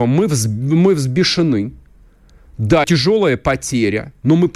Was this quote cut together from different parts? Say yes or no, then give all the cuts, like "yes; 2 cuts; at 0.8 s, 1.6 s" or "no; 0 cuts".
yes; 1 cut; at 2.8 s